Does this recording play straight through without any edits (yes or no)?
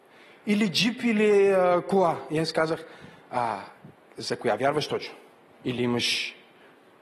yes